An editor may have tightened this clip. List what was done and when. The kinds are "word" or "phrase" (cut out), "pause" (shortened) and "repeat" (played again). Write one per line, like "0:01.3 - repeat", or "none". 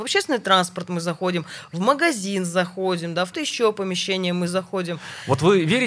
0:03.3 - word